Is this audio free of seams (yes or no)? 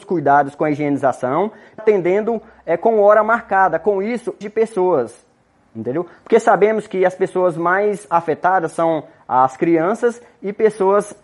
no